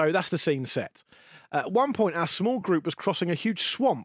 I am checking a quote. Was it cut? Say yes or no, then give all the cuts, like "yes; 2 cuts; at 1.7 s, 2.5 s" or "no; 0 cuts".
no; 0 cuts